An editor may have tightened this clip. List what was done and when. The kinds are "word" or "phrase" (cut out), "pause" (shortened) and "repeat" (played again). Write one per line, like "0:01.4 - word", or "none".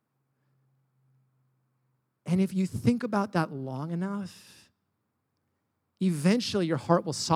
none